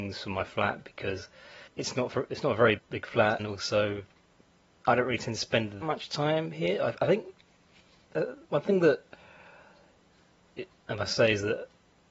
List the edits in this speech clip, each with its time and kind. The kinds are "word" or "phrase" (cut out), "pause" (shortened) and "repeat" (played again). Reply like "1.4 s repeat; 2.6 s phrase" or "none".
1.7 s pause; 2.8 s word; 3.4 s word; 5.8 s word; 8.4 s pause; 10.7 s word